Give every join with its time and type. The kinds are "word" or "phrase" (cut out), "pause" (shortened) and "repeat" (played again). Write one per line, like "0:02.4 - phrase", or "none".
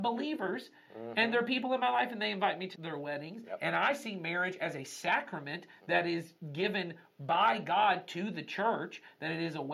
0:02.7 - word